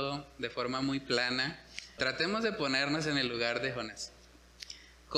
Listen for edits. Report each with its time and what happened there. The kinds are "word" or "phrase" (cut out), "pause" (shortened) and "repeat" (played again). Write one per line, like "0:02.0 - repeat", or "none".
0:02.0 - word

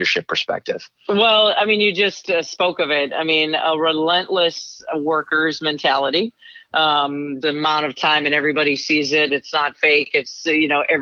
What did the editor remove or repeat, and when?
0:07.4 - word

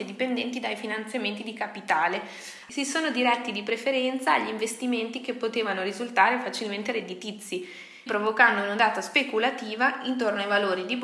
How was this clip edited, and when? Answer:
0:08.1 - word

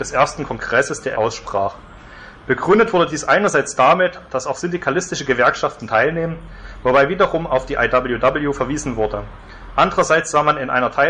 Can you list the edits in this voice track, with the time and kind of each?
0:01.1 - word

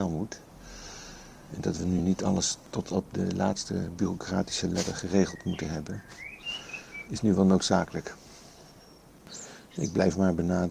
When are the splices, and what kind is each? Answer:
none

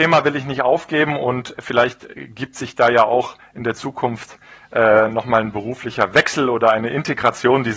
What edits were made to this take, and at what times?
none

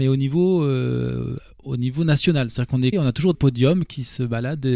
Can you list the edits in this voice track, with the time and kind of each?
0:02.9 - word
0:03.3 - word

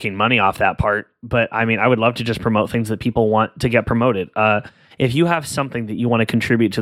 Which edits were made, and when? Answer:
none

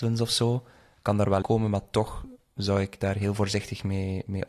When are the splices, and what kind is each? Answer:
0:01.4 - word

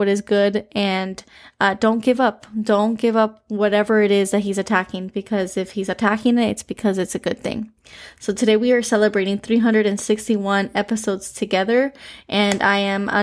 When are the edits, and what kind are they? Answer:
none

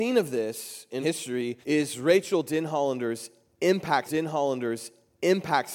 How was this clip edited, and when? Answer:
0:01.0 - word
0:01.6 - pause
0:04.1 - repeat

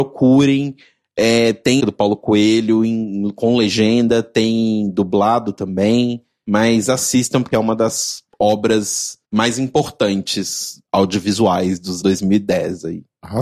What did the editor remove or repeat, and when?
0:01.8 - phrase
0:07.5 - phrase
0:09.2 - pause
0:10.8 - pause
0:12.0 - word

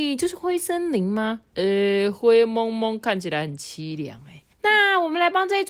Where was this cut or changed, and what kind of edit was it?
0:04.5 - pause

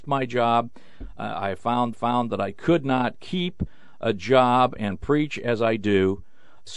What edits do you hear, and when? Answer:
0:01.9 - repeat

